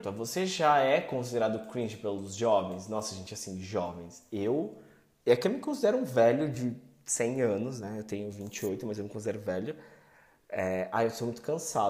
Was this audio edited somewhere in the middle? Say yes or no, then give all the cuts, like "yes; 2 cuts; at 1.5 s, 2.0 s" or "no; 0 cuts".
no; 0 cuts